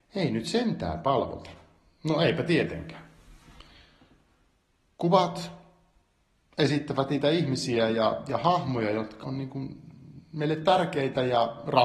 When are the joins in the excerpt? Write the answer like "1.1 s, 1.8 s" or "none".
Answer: 9.2 s